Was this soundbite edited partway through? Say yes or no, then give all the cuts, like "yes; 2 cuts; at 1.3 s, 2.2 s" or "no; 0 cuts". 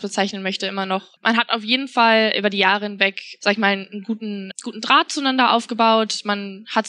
yes; 1 cut; at 4.5 s